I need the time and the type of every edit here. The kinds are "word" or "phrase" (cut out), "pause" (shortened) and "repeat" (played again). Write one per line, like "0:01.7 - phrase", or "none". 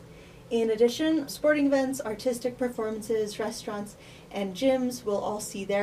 0:01.3 - word